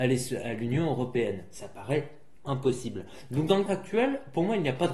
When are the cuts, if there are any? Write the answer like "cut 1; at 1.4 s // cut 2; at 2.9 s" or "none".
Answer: cut 1; at 2.4 s // cut 2; at 3.7 s